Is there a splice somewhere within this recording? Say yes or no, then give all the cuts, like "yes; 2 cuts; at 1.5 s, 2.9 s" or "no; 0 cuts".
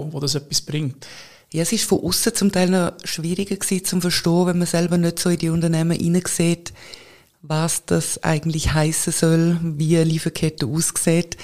no; 0 cuts